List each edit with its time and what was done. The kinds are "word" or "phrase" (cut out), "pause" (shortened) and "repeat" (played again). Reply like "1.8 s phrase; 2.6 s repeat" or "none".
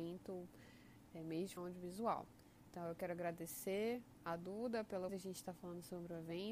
1.6 s word; 5.1 s word